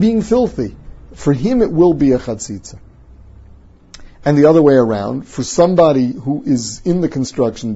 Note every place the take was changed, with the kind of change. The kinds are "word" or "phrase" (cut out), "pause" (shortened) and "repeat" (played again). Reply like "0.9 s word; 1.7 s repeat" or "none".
none